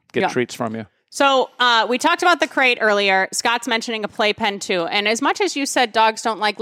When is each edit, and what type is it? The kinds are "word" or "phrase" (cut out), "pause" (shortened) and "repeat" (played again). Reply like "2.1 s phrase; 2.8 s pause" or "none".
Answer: none